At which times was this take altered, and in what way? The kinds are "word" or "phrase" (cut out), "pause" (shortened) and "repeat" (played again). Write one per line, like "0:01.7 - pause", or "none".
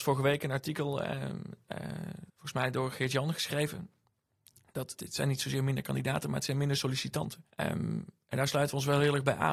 0:02.3 - pause
0:05.0 - word
0:07.5 - pause